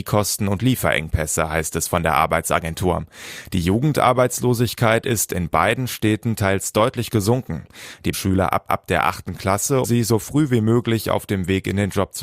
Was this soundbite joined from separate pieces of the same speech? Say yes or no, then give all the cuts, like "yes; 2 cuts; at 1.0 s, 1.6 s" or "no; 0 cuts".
yes; 3 cuts; at 8.1 s, 8.7 s, 9.8 s